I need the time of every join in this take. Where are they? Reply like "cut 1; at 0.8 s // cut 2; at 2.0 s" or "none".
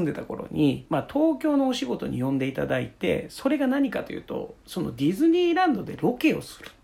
none